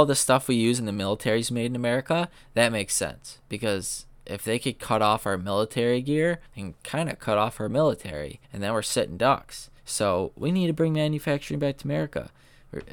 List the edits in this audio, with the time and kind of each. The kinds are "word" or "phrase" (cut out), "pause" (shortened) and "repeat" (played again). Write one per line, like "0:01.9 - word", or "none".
0:06.5 - pause
0:08.4 - pause
0:09.8 - pause